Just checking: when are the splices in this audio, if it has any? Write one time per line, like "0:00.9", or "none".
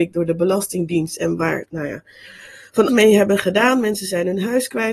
0:01.6
0:02.9